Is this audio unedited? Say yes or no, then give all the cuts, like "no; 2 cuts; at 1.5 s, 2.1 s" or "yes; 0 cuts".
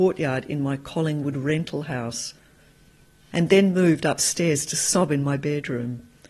yes; 0 cuts